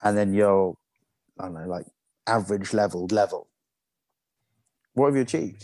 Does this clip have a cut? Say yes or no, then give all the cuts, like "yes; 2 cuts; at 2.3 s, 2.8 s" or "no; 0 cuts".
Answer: yes; 3 cuts; at 1.0 s, 2.1 s, 3.1 s